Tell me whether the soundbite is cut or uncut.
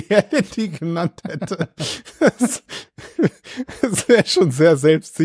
uncut